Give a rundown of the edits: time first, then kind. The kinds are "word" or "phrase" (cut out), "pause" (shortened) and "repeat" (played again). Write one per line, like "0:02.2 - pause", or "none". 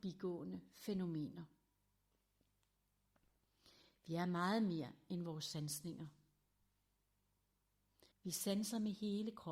0:08.1 - pause